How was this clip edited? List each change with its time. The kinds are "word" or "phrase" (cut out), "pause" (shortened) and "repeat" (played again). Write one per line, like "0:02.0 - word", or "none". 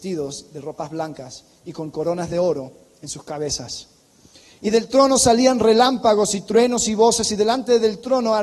none